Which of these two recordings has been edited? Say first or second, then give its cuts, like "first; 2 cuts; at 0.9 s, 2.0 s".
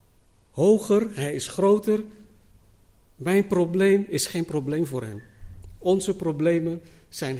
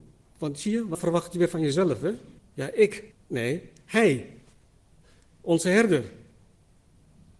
second; 3 cuts; at 0.9 s, 2.4 s, 3.1 s